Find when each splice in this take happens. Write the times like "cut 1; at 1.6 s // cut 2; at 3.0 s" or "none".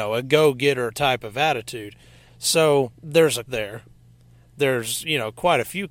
cut 1; at 2.9 s // cut 2; at 3.4 s